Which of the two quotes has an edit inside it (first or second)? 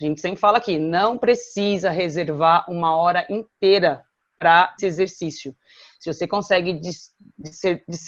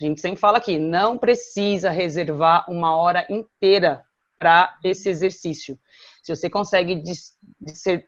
first